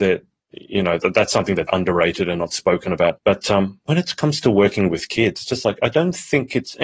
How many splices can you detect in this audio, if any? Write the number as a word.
two